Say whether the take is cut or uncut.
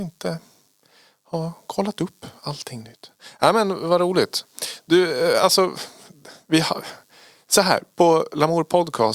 uncut